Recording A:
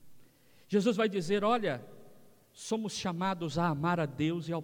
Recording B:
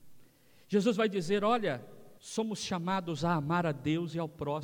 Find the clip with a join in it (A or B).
B